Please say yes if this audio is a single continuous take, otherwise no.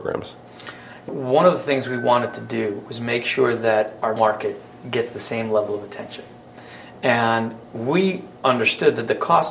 no